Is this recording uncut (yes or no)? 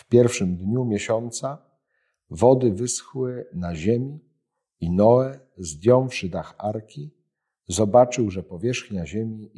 yes